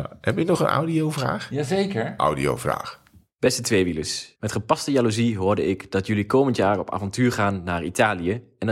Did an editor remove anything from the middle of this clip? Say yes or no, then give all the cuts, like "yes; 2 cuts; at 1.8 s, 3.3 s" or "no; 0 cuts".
yes; 1 cut; at 4.4 s